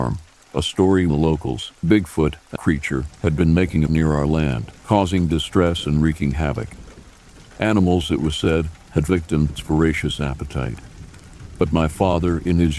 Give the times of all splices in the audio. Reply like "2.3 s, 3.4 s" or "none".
1.1 s, 1.8 s, 2.6 s, 3.9 s, 4.8 s, 9.1 s, 9.5 s